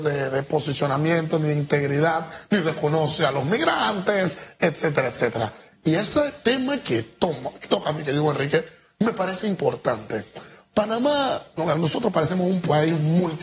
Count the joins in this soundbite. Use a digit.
0